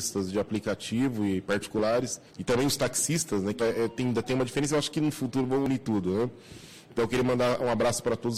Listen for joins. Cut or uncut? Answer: cut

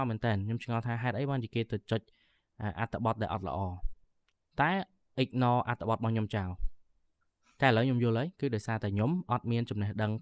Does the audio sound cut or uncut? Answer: uncut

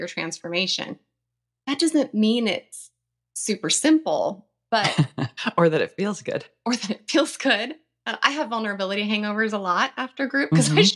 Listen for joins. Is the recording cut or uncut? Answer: uncut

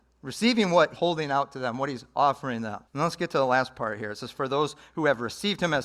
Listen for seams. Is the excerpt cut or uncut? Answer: cut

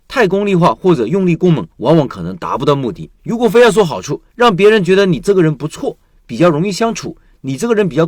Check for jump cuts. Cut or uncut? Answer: cut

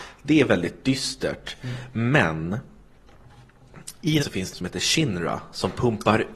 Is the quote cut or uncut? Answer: cut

